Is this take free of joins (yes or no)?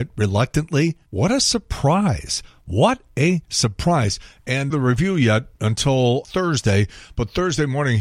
no